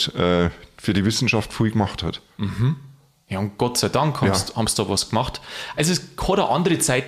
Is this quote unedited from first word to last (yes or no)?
yes